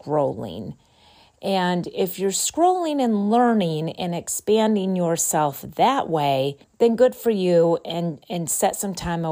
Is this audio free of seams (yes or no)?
no